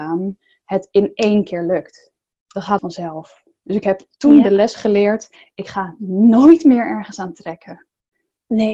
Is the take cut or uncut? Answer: cut